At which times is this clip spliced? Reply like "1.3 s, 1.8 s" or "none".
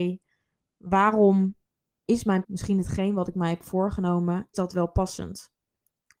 2.4 s, 4.5 s